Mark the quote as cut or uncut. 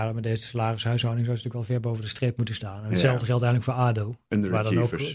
uncut